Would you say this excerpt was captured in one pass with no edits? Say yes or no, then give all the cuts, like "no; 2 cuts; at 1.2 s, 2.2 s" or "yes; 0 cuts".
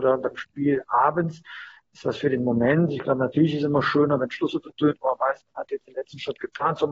yes; 0 cuts